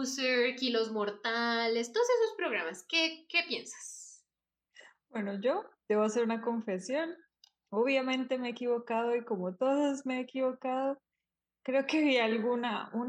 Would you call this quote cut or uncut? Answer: uncut